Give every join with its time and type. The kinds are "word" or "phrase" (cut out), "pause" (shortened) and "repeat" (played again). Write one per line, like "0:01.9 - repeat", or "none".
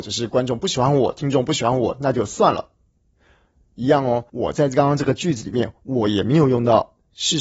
0:04.3 - pause